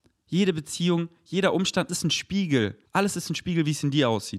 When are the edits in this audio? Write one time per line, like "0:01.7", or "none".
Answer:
0:01.9
0:02.9